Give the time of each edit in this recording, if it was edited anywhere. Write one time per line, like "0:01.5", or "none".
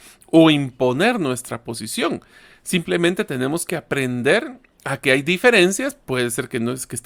none